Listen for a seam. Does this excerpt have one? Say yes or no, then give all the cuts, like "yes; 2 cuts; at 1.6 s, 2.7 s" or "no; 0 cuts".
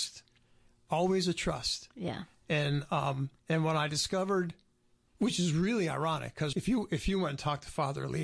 yes; 2 cuts; at 3.4 s, 6.5 s